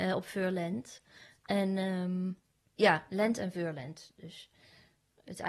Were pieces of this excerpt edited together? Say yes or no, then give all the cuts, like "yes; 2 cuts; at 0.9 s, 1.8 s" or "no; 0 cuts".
no; 0 cuts